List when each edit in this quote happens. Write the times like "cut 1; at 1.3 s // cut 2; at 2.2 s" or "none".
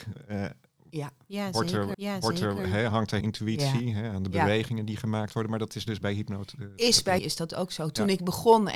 cut 1; at 1.9 s // cut 2; at 3.2 s // cut 3; at 7.2 s